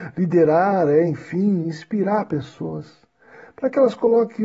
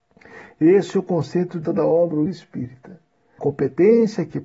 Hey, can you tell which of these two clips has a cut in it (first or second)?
second